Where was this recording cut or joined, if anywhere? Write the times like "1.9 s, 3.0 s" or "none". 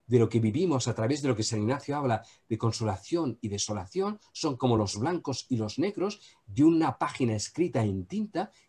none

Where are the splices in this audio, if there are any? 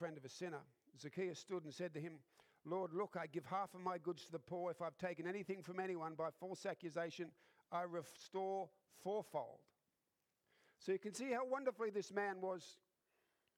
none

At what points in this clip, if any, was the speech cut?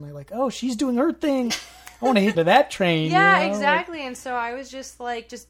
1.5 s, 2.3 s

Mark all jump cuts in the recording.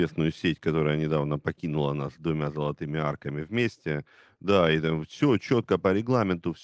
none

